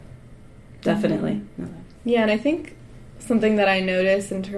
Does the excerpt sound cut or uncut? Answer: uncut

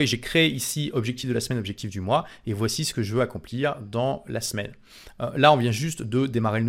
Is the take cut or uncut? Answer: uncut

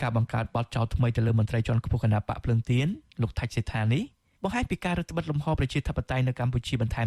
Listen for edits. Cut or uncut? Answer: uncut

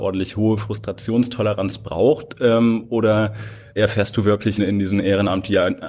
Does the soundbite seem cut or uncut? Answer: cut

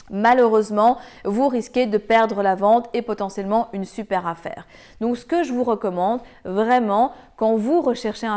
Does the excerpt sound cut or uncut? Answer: uncut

